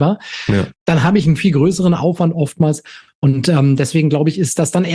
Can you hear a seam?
no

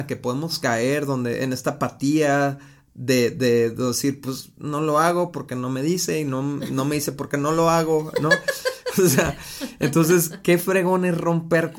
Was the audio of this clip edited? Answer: no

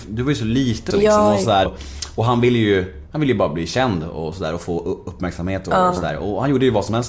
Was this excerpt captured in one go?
no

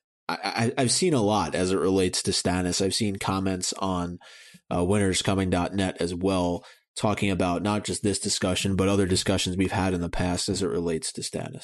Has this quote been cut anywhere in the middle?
no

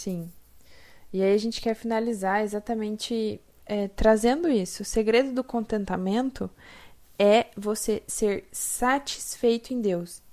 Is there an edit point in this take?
no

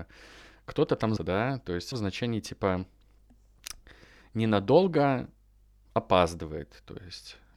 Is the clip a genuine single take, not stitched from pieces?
no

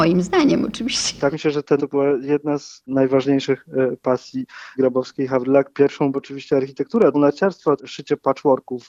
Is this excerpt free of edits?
no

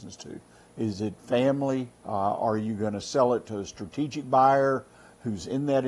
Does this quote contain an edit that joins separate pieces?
yes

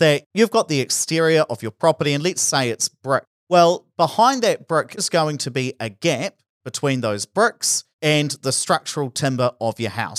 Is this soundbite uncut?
no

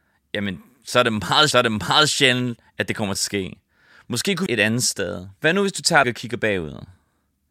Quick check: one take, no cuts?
no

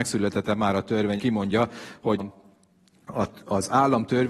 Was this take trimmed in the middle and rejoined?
yes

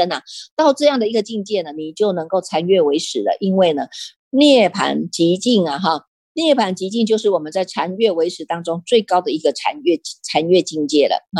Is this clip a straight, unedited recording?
yes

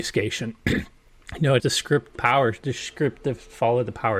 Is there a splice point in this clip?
yes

